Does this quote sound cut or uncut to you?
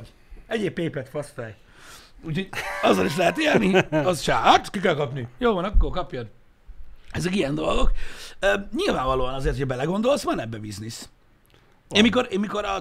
uncut